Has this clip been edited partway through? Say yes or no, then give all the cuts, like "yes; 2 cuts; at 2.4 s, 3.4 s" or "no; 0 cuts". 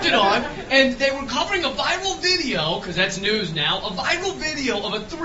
no; 0 cuts